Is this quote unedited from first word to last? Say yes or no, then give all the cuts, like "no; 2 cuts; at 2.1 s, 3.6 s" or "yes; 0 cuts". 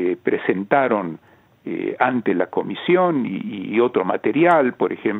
yes; 0 cuts